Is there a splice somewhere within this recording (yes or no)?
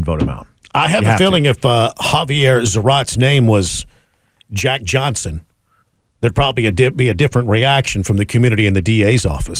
no